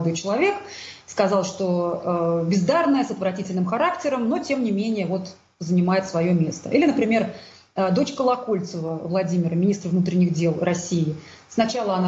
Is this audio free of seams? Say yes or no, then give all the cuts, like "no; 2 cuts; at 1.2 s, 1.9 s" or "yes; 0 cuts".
yes; 0 cuts